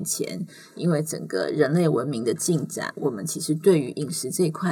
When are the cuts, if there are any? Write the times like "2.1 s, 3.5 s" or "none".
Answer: none

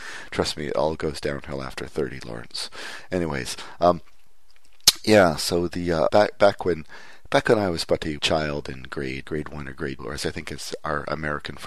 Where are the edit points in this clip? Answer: 6.1 s, 8.2 s, 9.2 s, 10.0 s

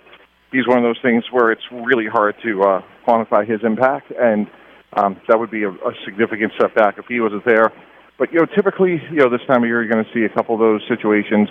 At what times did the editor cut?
none

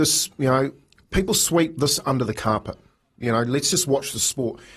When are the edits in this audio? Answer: none

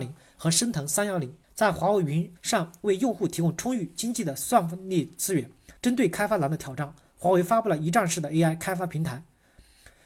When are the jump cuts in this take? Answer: 1.4 s, 2.4 s, 5.8 s

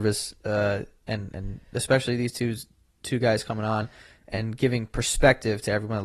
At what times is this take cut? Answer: none

